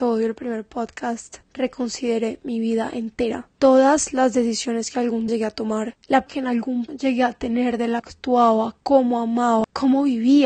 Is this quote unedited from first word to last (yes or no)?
no